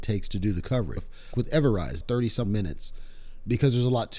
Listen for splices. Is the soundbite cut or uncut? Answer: cut